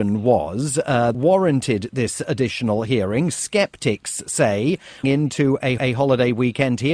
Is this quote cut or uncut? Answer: cut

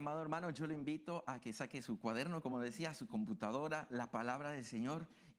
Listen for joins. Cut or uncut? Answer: uncut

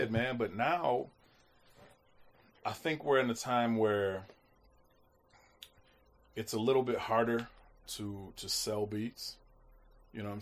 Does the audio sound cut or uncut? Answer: uncut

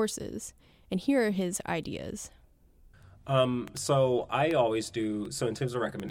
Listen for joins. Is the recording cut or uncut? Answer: uncut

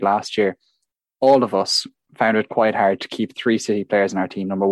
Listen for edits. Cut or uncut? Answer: uncut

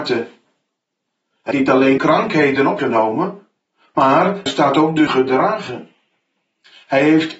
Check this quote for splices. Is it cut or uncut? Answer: cut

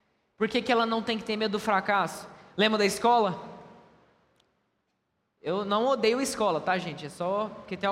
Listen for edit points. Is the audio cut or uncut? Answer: uncut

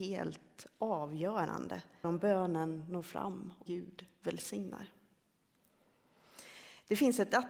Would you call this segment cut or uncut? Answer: cut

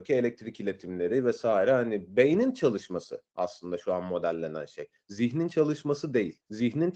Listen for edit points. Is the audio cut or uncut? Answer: cut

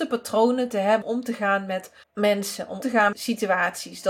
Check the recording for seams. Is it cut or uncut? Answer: cut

